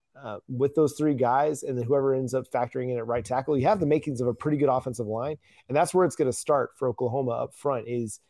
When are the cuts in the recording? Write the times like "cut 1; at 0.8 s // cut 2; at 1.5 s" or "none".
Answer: none